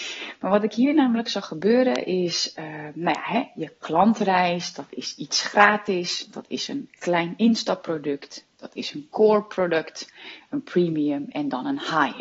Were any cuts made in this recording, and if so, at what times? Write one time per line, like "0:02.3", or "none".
none